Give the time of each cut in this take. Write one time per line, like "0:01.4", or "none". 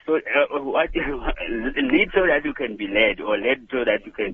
none